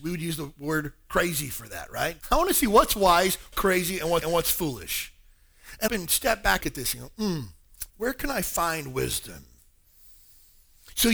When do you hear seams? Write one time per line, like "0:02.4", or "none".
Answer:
0:02.2
0:03.5
0:04.2
0:05.9
0:06.6
0:07.9